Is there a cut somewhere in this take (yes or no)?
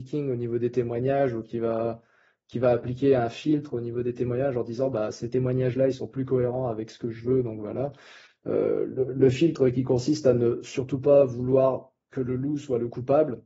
no